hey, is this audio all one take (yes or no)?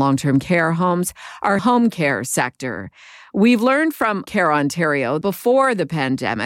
no